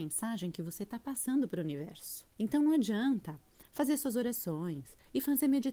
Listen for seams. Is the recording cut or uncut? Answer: cut